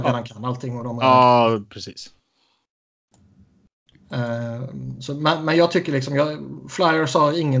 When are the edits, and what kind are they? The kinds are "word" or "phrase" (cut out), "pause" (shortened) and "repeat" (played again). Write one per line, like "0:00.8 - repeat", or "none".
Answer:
none